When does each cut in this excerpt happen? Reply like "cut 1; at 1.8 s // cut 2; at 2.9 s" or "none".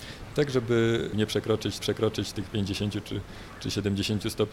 cut 1; at 1.8 s